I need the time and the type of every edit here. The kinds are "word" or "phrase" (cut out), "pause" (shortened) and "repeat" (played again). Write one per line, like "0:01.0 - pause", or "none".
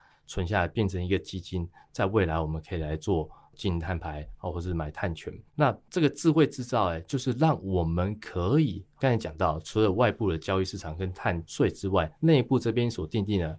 0:05.5 - pause
0:12.1 - pause